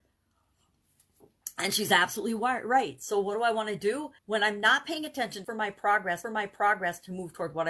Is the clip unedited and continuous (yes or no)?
no